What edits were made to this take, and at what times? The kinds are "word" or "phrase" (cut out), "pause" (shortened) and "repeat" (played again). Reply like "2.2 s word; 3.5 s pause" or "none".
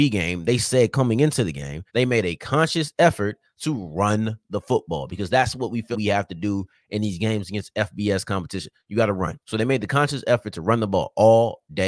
1.9 s pause; 5.9 s word; 9.4 s pause